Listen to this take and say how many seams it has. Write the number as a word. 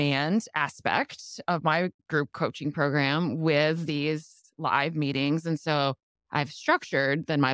one